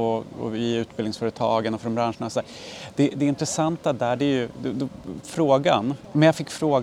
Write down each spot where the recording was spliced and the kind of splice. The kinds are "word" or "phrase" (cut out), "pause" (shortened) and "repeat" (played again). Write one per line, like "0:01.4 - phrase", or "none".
0:05.2 - word